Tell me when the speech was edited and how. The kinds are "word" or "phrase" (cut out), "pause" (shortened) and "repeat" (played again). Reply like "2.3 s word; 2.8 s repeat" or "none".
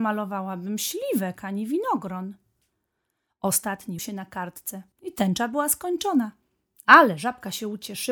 4.0 s phrase; 4.9 s pause